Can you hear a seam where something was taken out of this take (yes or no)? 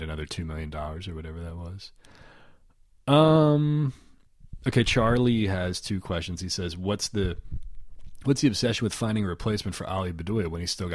no